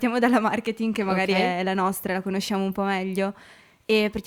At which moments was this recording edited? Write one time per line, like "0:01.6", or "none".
none